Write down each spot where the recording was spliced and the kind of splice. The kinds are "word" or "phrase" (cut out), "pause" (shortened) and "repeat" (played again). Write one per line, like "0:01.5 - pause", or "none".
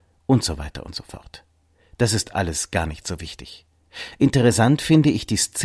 none